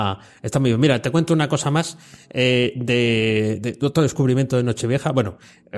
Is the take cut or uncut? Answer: uncut